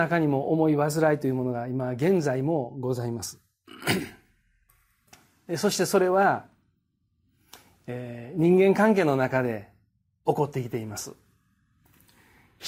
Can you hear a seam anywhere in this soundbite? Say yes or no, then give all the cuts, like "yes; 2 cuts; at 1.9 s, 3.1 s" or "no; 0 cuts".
no; 0 cuts